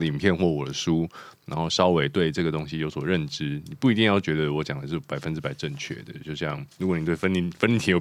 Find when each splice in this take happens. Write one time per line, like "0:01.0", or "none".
0:06.7